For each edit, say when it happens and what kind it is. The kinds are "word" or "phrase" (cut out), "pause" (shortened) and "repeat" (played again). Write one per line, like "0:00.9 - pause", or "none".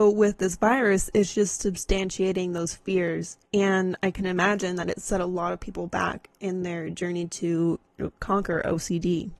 0:03.5 - pause